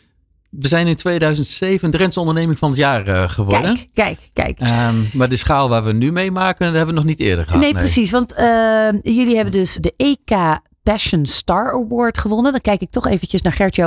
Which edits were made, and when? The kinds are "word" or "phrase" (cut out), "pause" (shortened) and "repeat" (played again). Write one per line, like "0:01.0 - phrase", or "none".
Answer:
0:09.8 - word